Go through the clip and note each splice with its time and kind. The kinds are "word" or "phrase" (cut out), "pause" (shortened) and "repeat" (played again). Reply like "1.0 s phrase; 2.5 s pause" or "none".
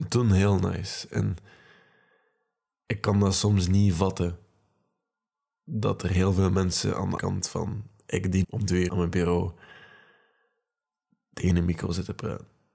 7.2 s word; 8.4 s word; 8.9 s word